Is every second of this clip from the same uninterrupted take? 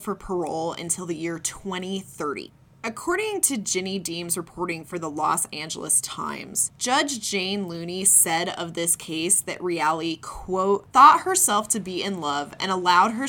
yes; 0 cuts

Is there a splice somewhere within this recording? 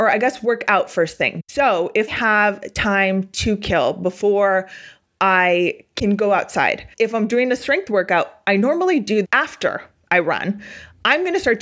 yes; 3 cuts; at 2.1 s, 6.9 s, 9.2 s

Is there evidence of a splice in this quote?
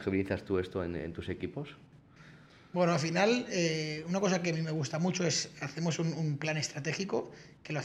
no; 0 cuts

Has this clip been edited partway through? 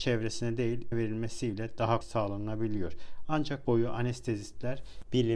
yes; 3 cuts; at 0.9 s, 2.0 s, 3.6 s

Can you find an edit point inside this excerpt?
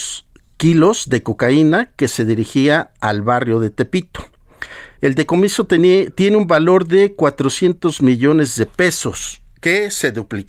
no; 0 cuts

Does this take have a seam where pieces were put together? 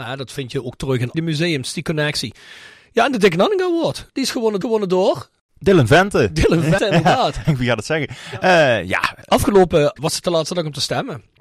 yes; 6 cuts; at 1.1 s, 4.1 s, 4.6 s, 6.8 s, 7.4 s, 10.0 s

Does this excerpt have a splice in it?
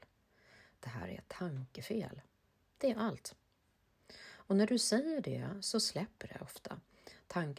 no; 0 cuts

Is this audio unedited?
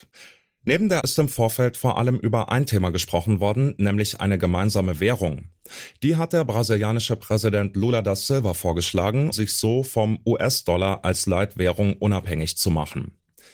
no; 2 cuts; at 1.0 s, 9.3 s

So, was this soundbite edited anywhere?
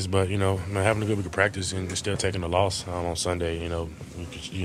no; 0 cuts

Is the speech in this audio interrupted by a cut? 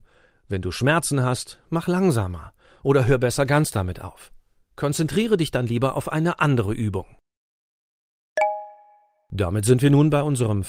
no; 0 cuts

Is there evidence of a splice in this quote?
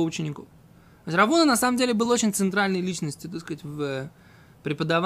no; 0 cuts

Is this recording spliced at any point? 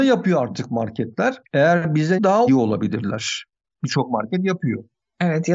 yes; 3 cuts; at 1.4 s, 2.2 s, 2.5 s

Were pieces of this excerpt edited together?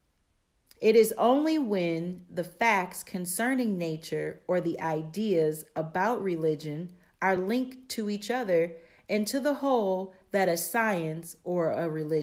no; 0 cuts

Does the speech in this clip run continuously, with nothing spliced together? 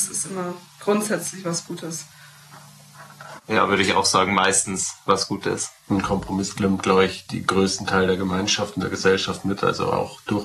no; 1 cut; at 5.8 s

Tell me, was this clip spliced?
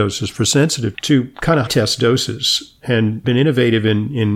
yes; 3 cuts; at 0.9 s, 1.7 s, 3.2 s

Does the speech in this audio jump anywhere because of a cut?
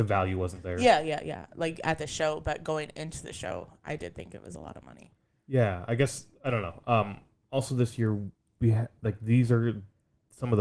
no; 0 cuts

